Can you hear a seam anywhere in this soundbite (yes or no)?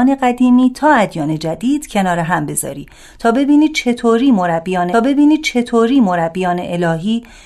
yes